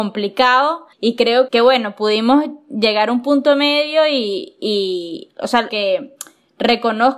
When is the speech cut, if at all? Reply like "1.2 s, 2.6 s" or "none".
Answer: 0.9 s, 1.5 s, 5.7 s